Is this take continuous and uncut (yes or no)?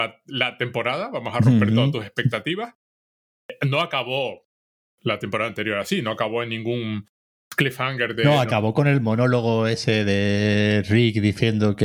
yes